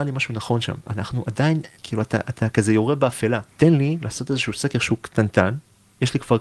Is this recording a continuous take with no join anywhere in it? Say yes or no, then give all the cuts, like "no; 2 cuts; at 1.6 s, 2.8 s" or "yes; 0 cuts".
no; 2 cuts; at 1.8 s, 3.5 s